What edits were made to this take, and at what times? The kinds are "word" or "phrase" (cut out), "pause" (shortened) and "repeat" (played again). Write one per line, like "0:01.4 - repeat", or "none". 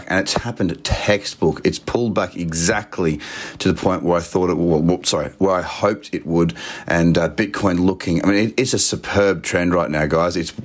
none